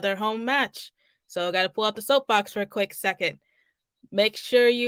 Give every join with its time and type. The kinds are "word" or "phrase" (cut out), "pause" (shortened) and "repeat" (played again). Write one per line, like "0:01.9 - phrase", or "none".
none

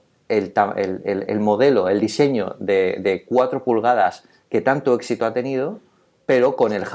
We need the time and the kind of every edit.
none

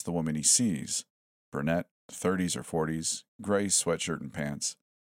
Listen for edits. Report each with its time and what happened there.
none

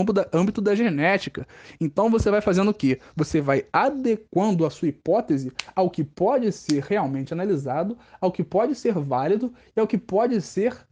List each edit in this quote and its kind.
none

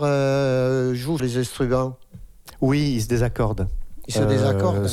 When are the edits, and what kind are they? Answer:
0:01.2 - word

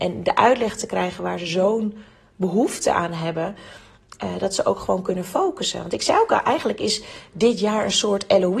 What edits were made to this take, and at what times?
none

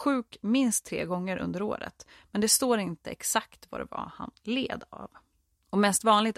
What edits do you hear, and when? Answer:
none

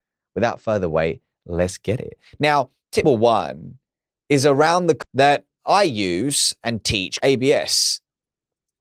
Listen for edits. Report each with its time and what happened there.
0:03.0 - word
0:05.0 - word
0:07.2 - word

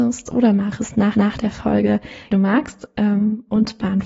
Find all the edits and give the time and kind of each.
0:01.1 - repeat
0:02.3 - phrase

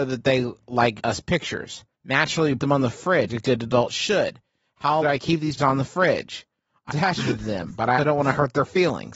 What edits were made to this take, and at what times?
0:01.0 - word
0:01.9 - pause
0:02.6 - word
0:03.3 - word
0:05.0 - word
0:05.6 - word
0:06.9 - phrase
0:08.0 - word

